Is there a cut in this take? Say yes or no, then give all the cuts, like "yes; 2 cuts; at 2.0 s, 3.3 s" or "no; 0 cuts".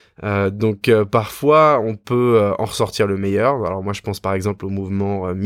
no; 0 cuts